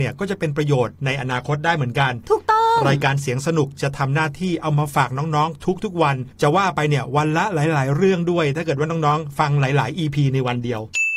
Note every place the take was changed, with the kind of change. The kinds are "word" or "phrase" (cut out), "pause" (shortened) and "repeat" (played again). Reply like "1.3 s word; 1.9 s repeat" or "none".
6.3 s pause